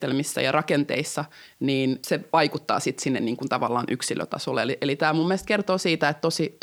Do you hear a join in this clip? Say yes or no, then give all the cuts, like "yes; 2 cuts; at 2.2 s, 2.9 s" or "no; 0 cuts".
no; 0 cuts